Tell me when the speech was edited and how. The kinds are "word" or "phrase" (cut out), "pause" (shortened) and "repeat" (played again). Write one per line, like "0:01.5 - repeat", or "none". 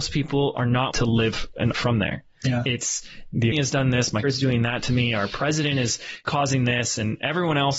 0:00.9 - word
0:01.7 - word
0:03.5 - word
0:04.2 - word

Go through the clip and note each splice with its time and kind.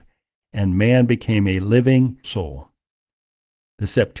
0:02.2 - word

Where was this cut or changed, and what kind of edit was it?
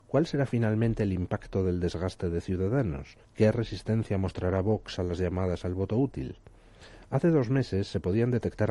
0:03.2 - pause

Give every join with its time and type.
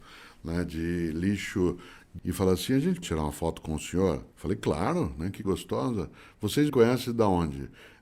0:02.2 - word
0:03.0 - word
0:04.3 - pause
0:05.4 - word
0:06.7 - word

